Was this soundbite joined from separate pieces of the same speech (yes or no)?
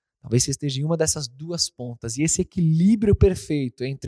no